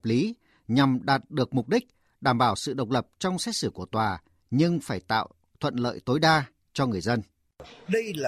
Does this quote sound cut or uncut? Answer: uncut